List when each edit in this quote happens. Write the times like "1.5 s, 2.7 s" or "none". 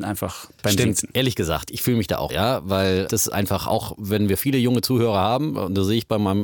2.3 s, 3.1 s